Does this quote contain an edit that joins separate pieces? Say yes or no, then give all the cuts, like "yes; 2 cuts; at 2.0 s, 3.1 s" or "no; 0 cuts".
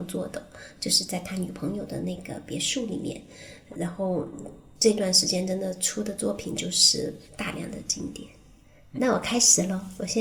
yes; 3 cuts; at 3.7 s, 7.3 s, 8.9 s